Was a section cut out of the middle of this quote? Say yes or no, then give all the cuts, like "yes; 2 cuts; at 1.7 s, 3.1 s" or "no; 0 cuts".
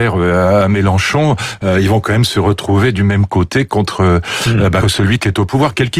yes; 1 cut; at 4.8 s